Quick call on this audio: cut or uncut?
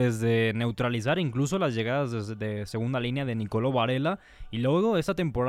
uncut